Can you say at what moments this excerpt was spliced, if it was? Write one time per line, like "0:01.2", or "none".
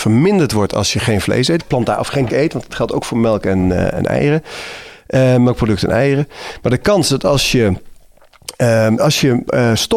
0:01.6
0:02.3
0:03.9
0:09.0